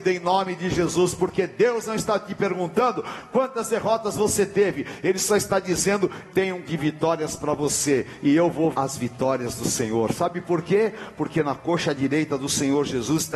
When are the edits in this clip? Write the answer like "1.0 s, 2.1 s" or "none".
6.2 s, 6.6 s, 8.7 s